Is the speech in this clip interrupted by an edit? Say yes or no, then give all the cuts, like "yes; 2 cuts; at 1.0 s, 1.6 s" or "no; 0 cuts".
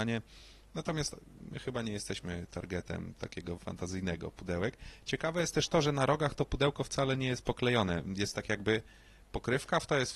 yes; 1 cut; at 3.6 s